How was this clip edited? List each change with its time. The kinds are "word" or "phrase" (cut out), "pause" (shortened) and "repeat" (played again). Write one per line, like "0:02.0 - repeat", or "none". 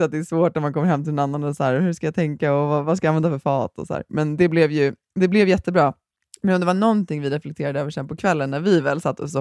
none